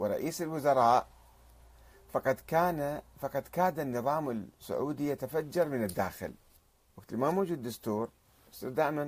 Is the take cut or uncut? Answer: uncut